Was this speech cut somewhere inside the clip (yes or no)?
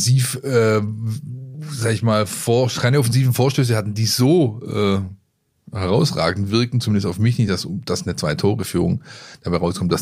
no